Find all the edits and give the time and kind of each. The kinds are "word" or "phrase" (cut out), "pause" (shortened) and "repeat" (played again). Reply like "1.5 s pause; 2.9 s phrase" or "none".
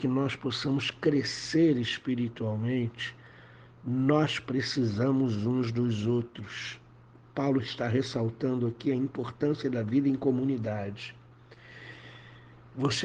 none